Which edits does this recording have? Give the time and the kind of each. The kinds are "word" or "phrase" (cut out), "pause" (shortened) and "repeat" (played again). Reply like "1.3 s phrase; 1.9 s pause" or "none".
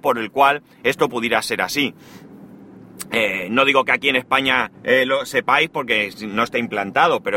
4.7 s pause